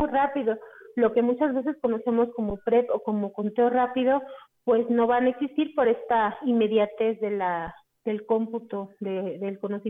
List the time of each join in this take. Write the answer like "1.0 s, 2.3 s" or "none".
none